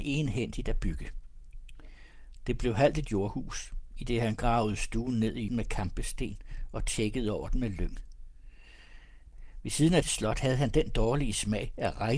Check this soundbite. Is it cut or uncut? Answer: cut